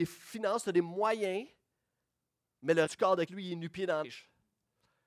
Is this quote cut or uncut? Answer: cut